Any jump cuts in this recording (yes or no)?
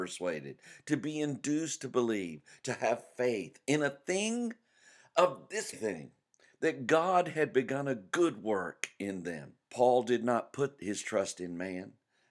yes